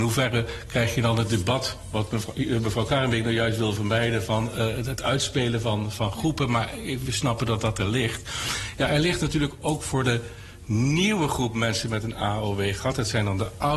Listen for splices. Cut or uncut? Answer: uncut